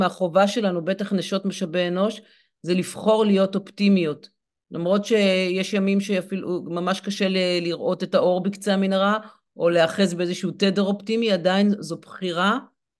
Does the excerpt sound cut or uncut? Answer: uncut